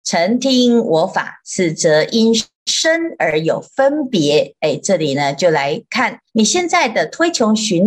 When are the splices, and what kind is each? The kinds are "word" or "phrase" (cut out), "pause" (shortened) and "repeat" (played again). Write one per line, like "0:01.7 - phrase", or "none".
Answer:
0:06.3 - pause